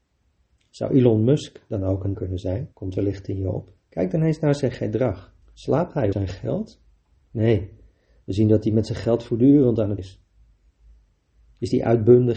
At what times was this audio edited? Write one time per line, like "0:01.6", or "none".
0:02.1
0:02.7
0:03.8
0:05.4
0:06.1
0:10.0